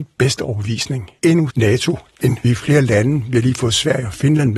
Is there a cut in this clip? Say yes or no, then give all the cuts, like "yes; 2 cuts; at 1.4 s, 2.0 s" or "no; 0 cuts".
yes; 3 cuts; at 1.2 s, 1.5 s, 2.4 s